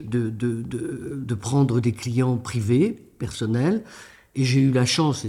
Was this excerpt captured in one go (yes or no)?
yes